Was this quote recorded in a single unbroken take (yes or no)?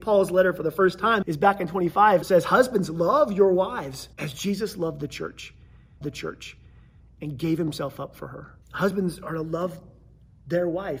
no